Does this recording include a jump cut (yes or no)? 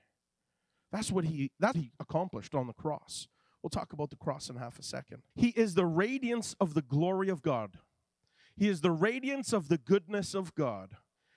yes